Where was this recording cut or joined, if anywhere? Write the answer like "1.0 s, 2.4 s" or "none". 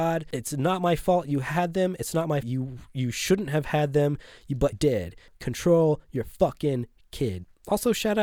2.4 s, 4.7 s